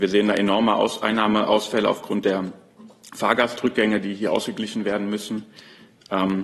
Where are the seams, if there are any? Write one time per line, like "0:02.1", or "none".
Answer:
none